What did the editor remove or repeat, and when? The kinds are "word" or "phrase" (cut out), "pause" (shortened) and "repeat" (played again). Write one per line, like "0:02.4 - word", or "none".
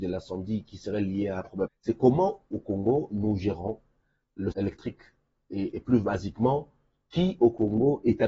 0:01.7 - word
0:04.5 - word

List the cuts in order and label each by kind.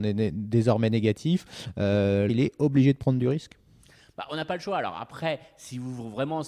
0:02.3 - word

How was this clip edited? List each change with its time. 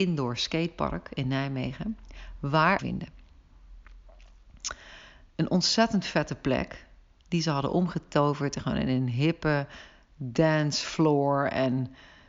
0:02.8 - phrase

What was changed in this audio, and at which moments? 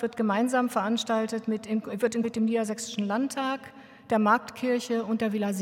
0:02.2 - word

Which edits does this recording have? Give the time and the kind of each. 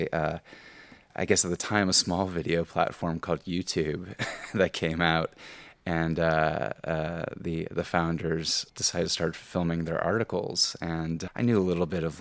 none

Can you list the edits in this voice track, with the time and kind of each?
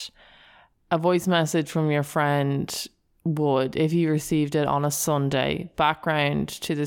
none

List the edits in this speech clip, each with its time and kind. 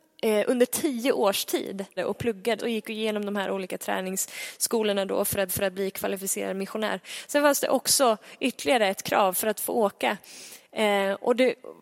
0:02.0 - word
0:02.6 - word
0:05.5 - repeat

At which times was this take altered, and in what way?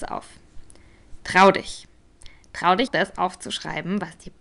0:02.9 - word

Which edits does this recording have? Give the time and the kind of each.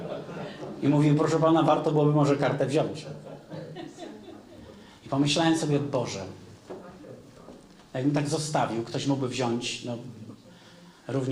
none

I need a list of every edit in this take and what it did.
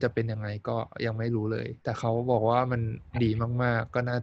0:01.8 - pause

